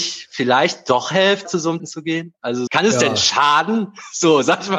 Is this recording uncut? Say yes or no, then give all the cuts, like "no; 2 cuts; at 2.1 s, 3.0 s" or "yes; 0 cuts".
no; 3 cuts; at 1.4 s, 1.8 s, 2.7 s